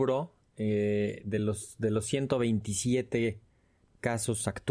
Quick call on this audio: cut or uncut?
uncut